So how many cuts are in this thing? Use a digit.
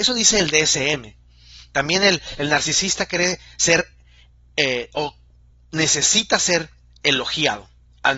0